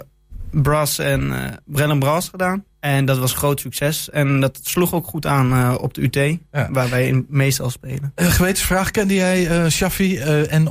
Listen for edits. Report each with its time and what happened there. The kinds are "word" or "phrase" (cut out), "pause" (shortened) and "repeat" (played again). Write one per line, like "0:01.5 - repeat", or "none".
0:02.7 - pause